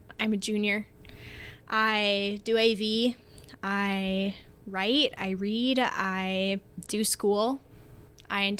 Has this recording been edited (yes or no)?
no